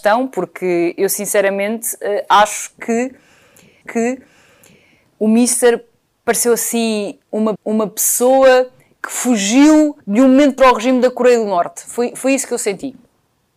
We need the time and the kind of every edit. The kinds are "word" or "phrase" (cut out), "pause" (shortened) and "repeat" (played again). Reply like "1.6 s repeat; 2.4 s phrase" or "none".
3.8 s repeat; 7.6 s repeat; 10.0 s pause; 10.6 s phrase